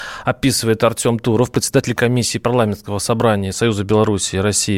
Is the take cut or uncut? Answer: uncut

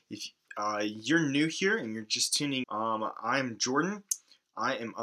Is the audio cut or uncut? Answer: cut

